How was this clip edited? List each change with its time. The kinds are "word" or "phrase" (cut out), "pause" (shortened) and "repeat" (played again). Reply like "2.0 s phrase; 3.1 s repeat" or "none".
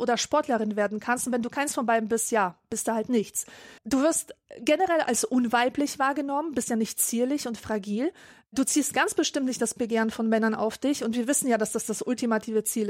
3.8 s pause